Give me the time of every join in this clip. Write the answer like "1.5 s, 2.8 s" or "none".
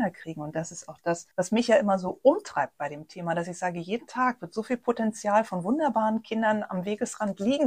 1.3 s